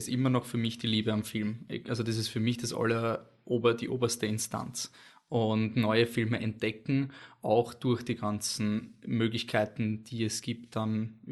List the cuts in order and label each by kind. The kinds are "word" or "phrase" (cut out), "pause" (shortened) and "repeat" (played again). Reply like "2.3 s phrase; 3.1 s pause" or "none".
none